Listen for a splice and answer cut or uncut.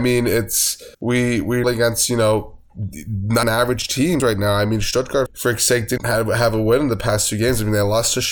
cut